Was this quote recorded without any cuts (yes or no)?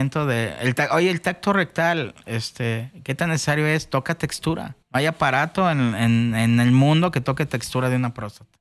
no